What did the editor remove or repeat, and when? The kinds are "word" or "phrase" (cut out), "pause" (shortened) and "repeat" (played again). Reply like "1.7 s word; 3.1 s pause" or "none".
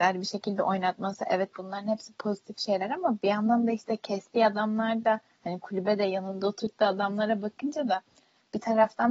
none